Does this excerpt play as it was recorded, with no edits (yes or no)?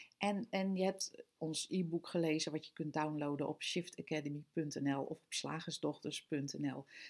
yes